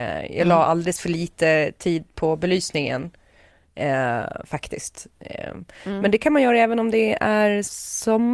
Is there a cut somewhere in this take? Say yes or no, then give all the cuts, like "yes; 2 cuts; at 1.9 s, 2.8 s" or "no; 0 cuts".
no; 0 cuts